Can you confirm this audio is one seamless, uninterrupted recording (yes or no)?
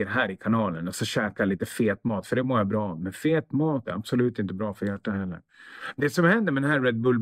yes